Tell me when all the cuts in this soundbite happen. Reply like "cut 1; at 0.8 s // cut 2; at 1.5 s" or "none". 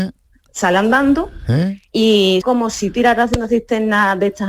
cut 1; at 2.4 s // cut 2; at 2.9 s